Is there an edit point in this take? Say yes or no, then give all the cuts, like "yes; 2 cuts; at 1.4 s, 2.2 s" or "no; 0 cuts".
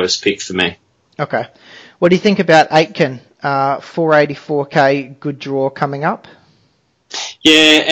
no; 0 cuts